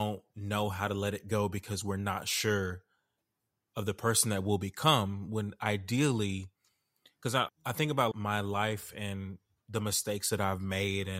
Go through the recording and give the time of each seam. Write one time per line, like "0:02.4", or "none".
0:07.5
0:08.1